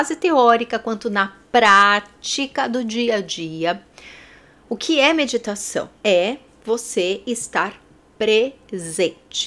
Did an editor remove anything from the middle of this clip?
yes; 1 cut; at 6.0 s

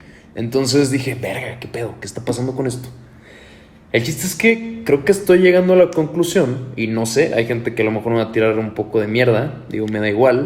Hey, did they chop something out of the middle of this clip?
no; 0 cuts

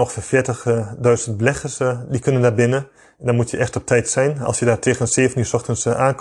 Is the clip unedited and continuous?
yes; 0 cuts

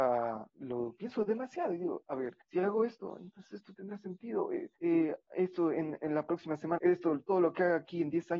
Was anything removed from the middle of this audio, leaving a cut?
yes; 3 cuts; at 2.4 s, 4.8 s, 6.8 s

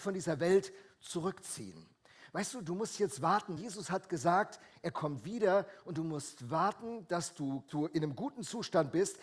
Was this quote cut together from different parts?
yes; 2 cuts; at 3.6 s, 7.7 s

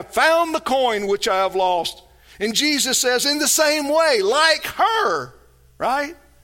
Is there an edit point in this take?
no; 0 cuts

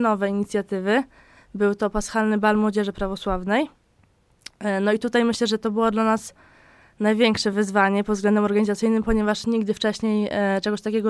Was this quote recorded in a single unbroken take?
yes; 0 cuts

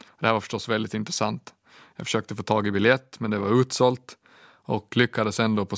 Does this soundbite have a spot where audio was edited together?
no; 0 cuts

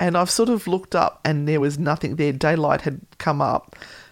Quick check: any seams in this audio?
no; 0 cuts

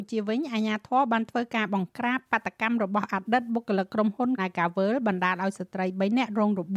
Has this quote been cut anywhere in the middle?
yes; 1 cut; at 4.4 s

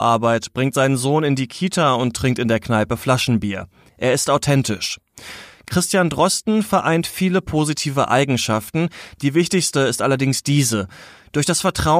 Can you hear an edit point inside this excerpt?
no; 0 cuts

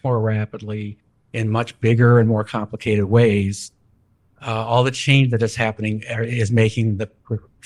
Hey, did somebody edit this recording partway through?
no; 0 cuts

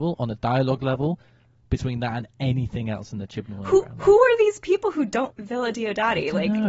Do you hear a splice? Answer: yes; 1 cut; at 5.3 s

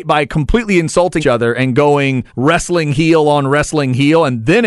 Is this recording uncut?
no; 2 cuts; at 1.2 s, 2.3 s

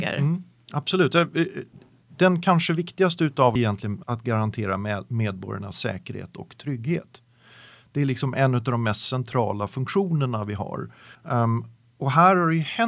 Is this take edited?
yes; 3 cuts; at 3.6 s, 4.0 s, 11.1 s

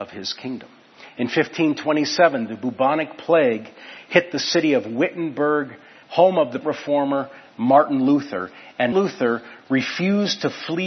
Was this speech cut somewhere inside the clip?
yes; 3 cuts; at 6.0 s, 6.6 s, 8.9 s

